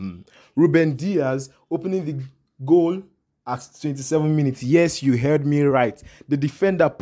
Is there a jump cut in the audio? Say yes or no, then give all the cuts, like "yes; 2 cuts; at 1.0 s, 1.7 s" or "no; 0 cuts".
no; 0 cuts